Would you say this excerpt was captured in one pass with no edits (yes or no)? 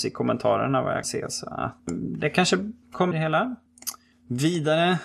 no